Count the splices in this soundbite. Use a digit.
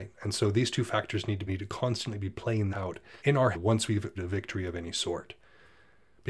5